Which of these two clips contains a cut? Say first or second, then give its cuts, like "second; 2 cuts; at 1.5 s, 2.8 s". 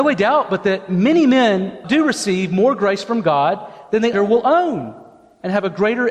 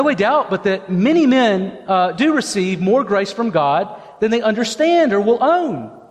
first; 2 cuts; at 1.8 s, 4.1 s